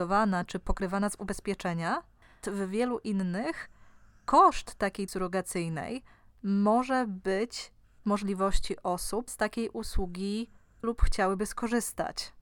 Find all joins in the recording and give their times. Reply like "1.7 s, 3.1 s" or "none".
2.4 s, 5.1 s, 8.0 s, 9.3 s, 10.8 s